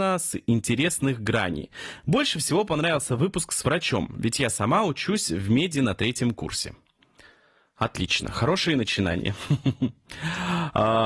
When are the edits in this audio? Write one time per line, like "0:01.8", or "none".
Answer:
none